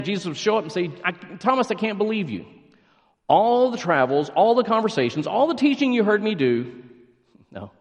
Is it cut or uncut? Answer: uncut